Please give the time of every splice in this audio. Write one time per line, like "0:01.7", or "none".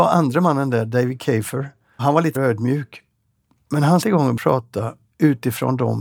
0:02.0
0:02.4
0:04.0
0:04.4